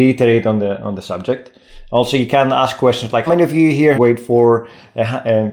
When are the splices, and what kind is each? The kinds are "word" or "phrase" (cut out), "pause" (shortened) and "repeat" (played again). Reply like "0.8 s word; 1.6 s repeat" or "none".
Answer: 3.3 s word; 3.9 s phrase

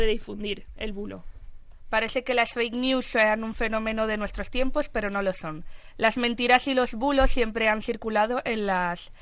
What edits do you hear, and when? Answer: none

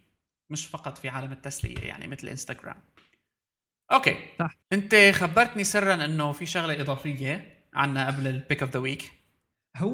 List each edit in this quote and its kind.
4.6 s pause

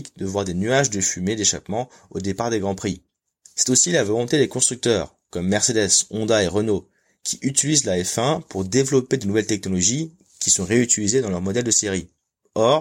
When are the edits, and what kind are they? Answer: none

